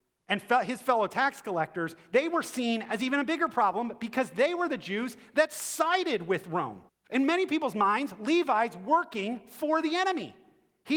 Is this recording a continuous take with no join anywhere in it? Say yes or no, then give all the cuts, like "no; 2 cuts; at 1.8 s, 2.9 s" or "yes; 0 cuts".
no; 1 cut; at 6.9 s